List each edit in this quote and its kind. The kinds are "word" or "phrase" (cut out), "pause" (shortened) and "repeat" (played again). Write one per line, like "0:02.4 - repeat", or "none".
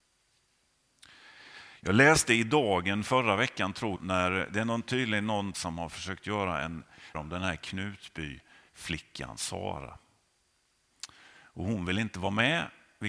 0:03.9 - word
0:05.5 - word
0:07.1 - word